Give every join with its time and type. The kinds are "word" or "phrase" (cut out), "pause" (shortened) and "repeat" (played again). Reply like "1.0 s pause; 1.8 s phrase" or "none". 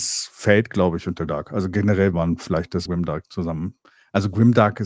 1.3 s word; 2.1 s word; 2.9 s word